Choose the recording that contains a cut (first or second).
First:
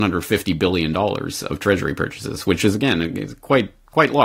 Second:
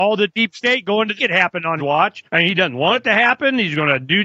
second